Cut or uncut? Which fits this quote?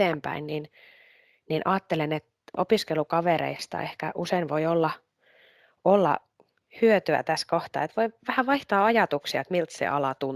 uncut